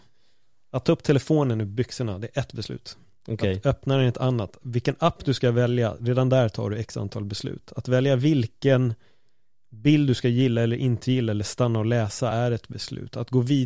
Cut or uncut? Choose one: uncut